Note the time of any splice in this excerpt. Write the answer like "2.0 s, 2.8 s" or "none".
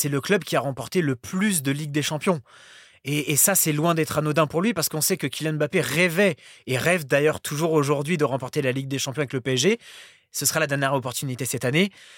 none